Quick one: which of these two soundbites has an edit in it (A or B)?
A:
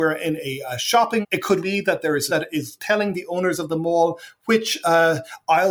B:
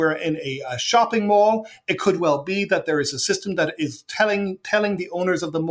A